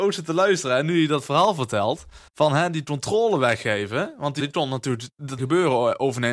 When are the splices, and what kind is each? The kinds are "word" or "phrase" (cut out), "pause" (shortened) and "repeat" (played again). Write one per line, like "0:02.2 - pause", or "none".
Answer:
0:02.3 - pause
0:04.4 - word
0:05.4 - word